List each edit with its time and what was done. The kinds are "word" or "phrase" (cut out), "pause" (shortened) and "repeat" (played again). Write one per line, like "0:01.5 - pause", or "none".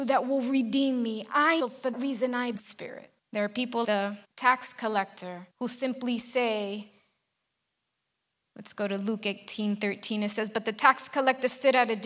0:01.6 - phrase
0:01.9 - word
0:02.6 - phrase
0:03.2 - pause
0:03.8 - word
0:04.2 - pause
0:05.5 - pause